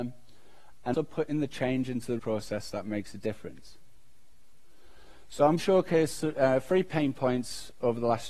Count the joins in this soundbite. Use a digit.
3